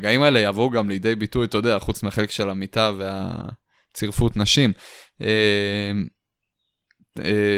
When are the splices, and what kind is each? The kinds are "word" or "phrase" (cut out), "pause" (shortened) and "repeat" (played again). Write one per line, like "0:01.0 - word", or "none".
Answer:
none